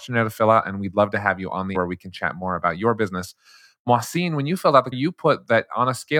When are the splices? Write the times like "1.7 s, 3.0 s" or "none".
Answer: 1.7 s, 4.9 s